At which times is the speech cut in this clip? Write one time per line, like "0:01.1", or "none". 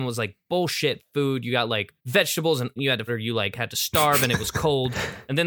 0:02.0
0:02.8
0:03.1

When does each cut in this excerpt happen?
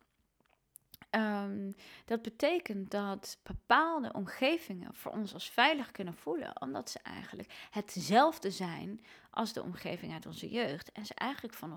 none

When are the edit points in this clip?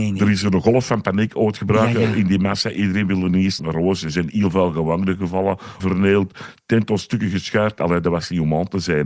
0:03.6
0:05.8

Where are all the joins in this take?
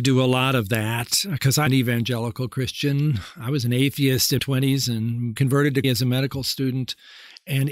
0:01.7
0:04.4
0:05.4
0:05.8

